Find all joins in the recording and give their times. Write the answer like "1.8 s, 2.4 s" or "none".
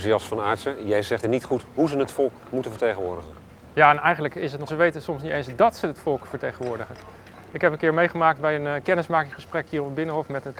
1.2 s, 4.7 s